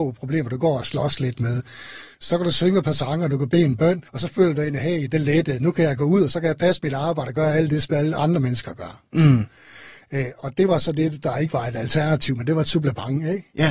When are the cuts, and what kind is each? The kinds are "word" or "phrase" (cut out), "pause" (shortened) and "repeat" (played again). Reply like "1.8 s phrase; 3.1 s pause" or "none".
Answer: 4.1 s pause